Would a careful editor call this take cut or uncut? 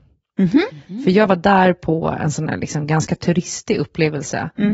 uncut